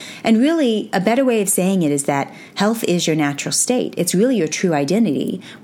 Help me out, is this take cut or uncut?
uncut